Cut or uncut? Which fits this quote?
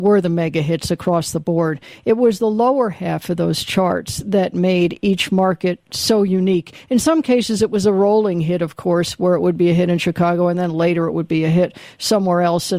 uncut